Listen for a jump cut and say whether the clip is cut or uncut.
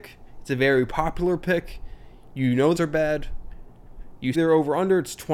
cut